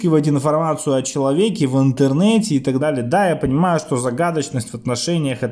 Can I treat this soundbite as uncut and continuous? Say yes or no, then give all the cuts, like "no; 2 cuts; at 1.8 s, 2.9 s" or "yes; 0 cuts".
no; 1 cut; at 2.8 s